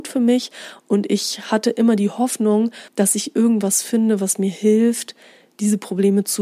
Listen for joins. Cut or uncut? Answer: cut